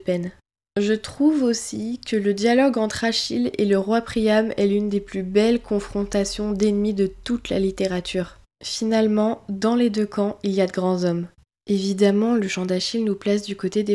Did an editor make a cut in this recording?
yes; 2 cuts; at 8.5 s, 11.4 s

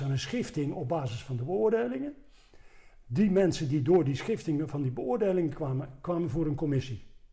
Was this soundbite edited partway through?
no; 0 cuts

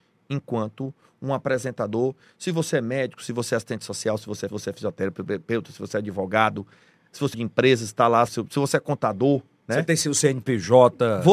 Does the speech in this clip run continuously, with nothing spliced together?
no; 3 cuts; at 4.5 s, 7.3 s, 8.3 s

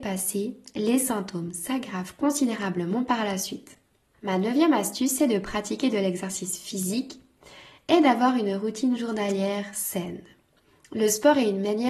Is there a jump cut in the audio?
no; 0 cuts

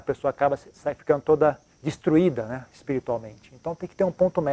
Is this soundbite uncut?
no; 1 cut; at 1.7 s

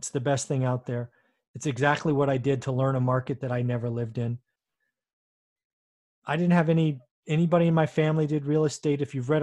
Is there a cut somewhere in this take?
no; 0 cuts

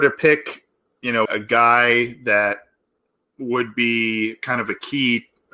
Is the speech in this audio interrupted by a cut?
yes; 1 cut; at 1.3 s

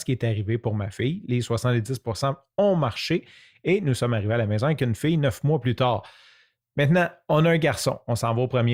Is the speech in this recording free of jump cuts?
yes; 0 cuts

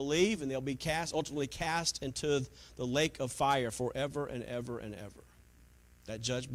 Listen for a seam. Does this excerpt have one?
no; 0 cuts

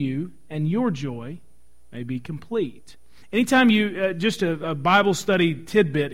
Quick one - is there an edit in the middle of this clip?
no; 0 cuts

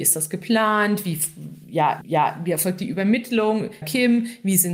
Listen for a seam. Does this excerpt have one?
yes; 2 cuts; at 2.0 s, 3.8 s

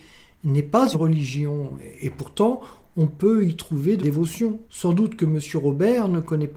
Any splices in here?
yes; 3 cuts; at 0.9 s, 4.0 s, 4.6 s

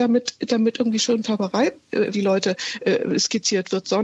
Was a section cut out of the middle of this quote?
yes; 1 cut; at 2.1 s

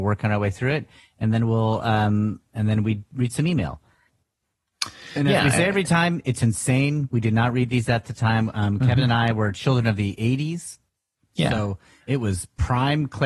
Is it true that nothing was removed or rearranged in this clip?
yes; 0 cuts

